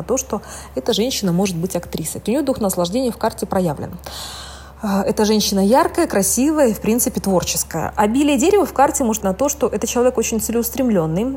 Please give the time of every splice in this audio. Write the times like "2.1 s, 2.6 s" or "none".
2.3 s, 9.2 s